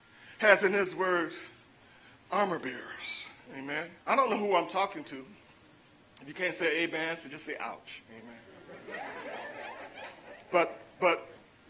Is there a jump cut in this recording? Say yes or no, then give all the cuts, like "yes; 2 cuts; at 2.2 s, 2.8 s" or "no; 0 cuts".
yes; 1 cut; at 4.0 s